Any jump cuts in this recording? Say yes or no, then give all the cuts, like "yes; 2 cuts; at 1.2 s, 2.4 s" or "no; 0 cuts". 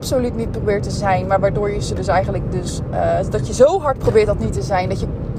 no; 0 cuts